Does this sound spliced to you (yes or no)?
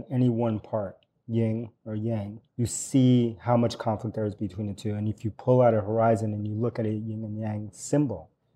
yes